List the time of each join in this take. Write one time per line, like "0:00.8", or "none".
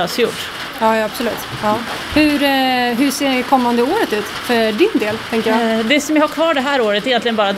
none